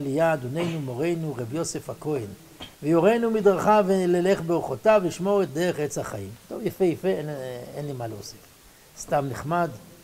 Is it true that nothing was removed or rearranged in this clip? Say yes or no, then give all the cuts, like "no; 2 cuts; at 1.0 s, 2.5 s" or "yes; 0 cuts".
no; 1 cut; at 2.7 s